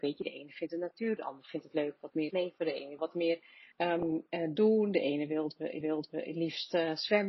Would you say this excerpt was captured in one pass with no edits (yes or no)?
no